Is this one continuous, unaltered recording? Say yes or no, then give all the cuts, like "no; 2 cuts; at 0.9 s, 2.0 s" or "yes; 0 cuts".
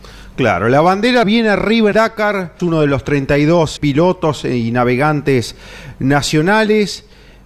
no; 4 cuts; at 1.2 s, 1.9 s, 2.6 s, 3.8 s